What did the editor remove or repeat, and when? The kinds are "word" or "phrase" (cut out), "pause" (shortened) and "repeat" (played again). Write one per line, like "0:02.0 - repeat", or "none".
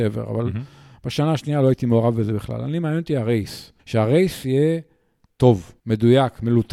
0:03.8 - pause
0:05.8 - pause